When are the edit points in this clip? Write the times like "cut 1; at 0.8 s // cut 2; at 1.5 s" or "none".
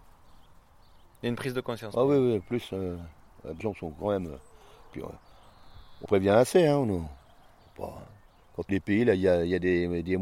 cut 1; at 3.6 s // cut 2; at 6.0 s // cut 3; at 8.7 s